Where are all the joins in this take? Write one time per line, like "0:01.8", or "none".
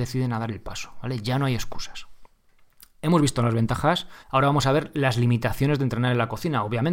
0:04.2